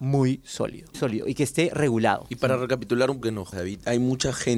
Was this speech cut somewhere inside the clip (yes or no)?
yes